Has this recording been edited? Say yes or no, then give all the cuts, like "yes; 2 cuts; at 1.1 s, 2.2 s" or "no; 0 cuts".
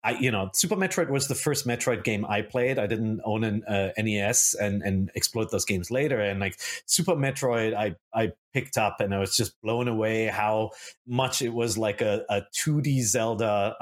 yes; 1 cut; at 11.0 s